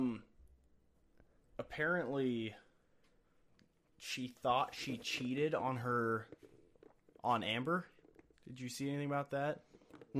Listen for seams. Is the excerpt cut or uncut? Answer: uncut